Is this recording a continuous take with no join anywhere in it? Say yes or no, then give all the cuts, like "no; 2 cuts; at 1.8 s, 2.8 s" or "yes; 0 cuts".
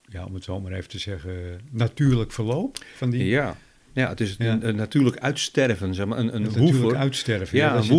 yes; 0 cuts